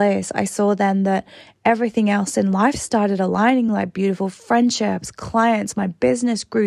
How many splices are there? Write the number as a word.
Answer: zero